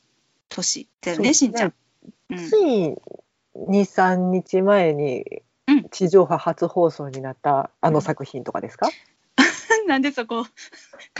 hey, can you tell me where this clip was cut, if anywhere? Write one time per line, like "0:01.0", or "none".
0:00.9
0:07.7